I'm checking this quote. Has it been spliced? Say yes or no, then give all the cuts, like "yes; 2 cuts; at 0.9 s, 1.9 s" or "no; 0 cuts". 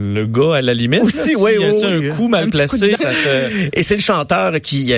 yes; 1 cut; at 3.0 s